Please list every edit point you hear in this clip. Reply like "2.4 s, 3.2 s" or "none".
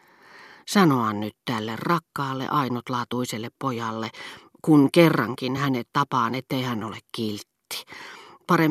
none